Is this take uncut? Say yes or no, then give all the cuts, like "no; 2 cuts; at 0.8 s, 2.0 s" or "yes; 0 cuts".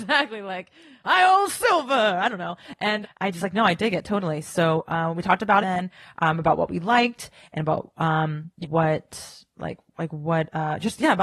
no; 4 cuts; at 3.0 s, 5.6 s, 8.6 s, 9.9 s